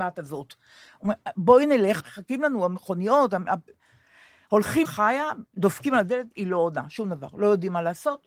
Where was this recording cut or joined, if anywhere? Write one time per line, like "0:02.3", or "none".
0:02.0
0:04.8
0:05.5